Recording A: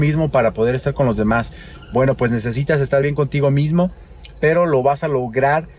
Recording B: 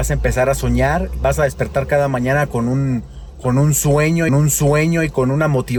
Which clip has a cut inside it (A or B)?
B